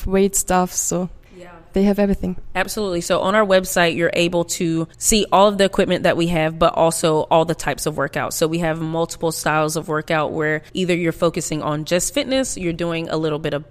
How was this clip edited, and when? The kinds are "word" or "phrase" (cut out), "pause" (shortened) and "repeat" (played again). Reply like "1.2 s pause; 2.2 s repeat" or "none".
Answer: 1.2 s pause; 4.9 s pause; 10.7 s pause